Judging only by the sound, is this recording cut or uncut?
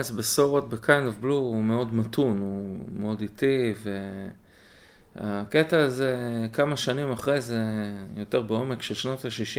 uncut